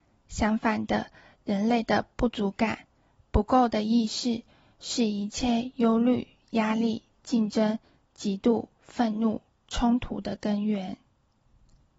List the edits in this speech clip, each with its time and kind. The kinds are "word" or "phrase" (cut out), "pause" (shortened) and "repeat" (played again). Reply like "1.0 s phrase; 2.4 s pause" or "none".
none

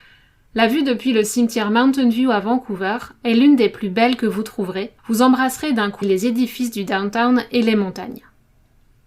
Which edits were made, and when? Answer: 5.0 s pause; 6.0 s word

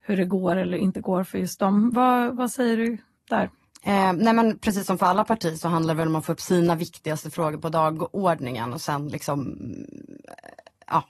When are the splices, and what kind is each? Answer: none

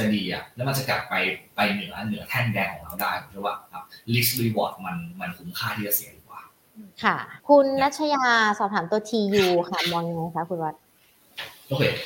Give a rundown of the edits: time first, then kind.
6.9 s pause; 7.4 s pause

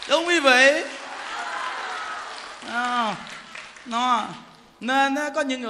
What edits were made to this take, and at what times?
none

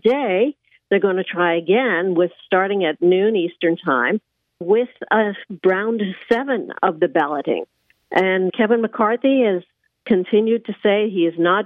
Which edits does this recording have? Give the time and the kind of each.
4.6 s word; 8.5 s word

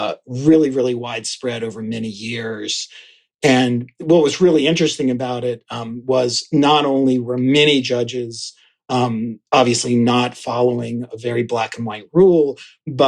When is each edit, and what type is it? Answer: none

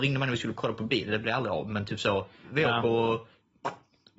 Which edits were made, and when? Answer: none

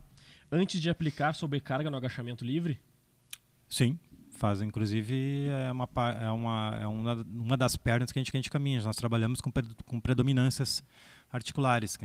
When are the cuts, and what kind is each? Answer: 8.3 s repeat

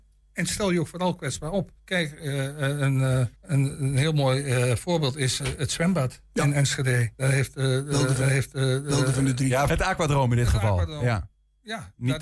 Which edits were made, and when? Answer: 1.8 s pause; 3.3 s pause; 7.1 s pause; 8.2 s repeat; 9.7 s word

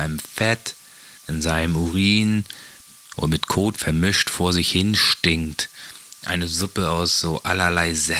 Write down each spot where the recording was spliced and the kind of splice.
1.2 s pause

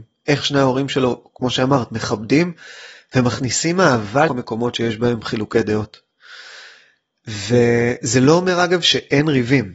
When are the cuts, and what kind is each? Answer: 4.3 s word

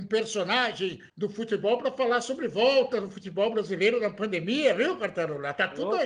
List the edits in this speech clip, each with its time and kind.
1.1 s pause

